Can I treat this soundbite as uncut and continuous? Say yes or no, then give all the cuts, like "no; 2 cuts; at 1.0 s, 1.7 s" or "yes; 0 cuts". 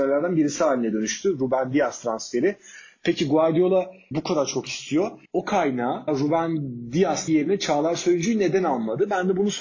no; 4 cuts; at 4.1 s, 5.3 s, 6.1 s, 7.3 s